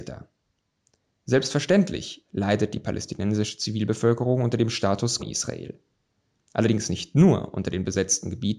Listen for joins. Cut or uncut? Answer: cut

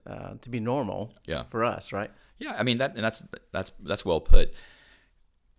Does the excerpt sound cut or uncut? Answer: uncut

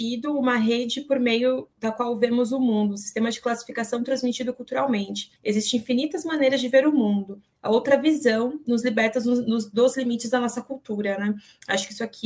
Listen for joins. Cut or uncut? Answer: cut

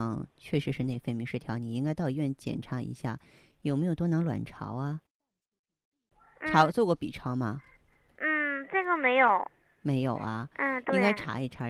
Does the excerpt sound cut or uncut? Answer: uncut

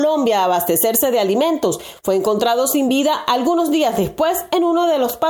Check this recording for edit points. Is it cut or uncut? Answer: uncut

